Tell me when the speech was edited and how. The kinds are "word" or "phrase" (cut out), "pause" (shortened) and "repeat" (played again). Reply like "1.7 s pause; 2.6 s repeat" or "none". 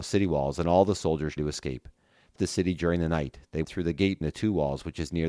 1.4 s word; 2.4 s word; 3.6 s word; 4.2 s word